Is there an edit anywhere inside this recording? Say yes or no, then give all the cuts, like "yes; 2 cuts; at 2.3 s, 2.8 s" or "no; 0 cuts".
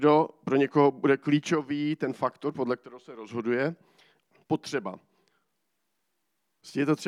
no; 0 cuts